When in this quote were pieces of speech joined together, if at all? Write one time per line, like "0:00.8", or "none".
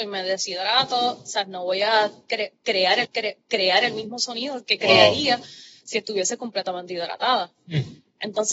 0:03.0